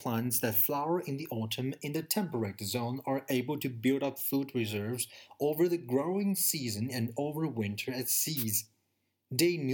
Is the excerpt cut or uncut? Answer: uncut